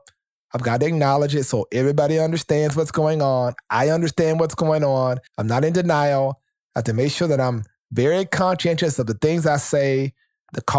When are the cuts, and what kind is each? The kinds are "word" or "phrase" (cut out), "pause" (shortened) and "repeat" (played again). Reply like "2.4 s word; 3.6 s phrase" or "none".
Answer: 5.3 s pause